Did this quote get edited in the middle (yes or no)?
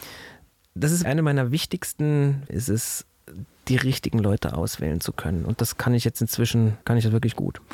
yes